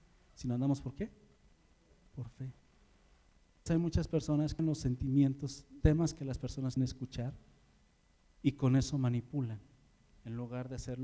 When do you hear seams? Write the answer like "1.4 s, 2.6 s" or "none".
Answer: 3.7 s, 4.6 s, 5.8 s, 6.8 s